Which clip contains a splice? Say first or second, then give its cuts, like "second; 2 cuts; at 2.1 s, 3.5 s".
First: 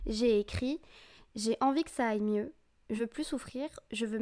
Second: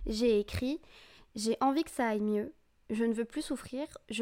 first; 1 cut; at 3.0 s